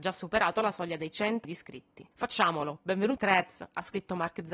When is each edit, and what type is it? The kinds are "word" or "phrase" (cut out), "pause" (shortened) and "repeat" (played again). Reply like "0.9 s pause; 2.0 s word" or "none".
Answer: 1.4 s word; 2.1 s pause; 3.2 s word